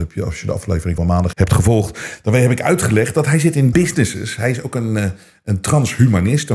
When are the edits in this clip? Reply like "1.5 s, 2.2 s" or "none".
1.0 s, 1.3 s, 3.7 s